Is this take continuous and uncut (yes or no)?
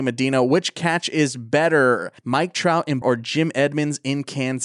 no